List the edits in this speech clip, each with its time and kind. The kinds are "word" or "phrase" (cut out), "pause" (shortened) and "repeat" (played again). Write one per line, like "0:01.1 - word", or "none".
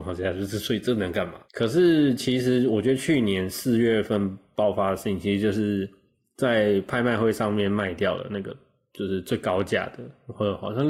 none